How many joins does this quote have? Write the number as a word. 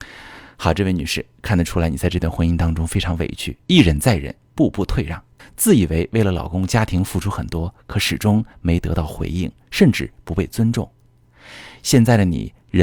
two